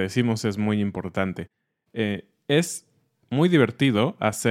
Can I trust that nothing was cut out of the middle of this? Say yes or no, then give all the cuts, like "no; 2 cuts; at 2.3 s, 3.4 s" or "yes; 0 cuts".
yes; 0 cuts